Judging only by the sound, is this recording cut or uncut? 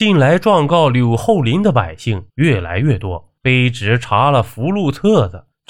cut